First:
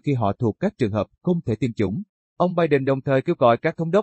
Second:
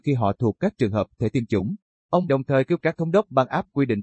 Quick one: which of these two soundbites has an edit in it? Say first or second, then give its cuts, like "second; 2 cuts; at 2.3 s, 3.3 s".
second; 3 cuts; at 1.2 s, 2.3 s, 2.8 s